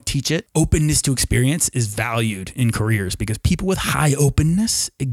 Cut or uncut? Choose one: uncut